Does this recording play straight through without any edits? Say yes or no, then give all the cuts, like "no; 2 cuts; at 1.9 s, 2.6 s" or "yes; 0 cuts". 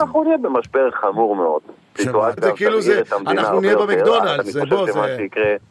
no; 2 cuts; at 0.9 s, 2.4 s